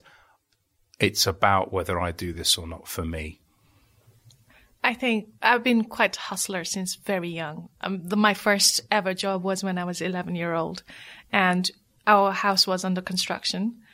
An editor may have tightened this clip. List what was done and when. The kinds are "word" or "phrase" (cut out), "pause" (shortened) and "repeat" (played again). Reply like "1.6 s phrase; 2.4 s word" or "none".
none